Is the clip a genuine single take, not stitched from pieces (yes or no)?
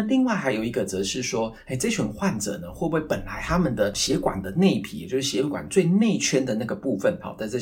yes